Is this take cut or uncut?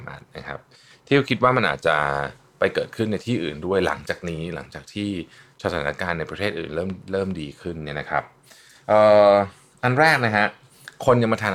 uncut